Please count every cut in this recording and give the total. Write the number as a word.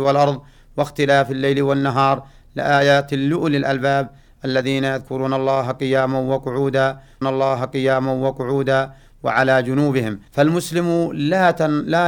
two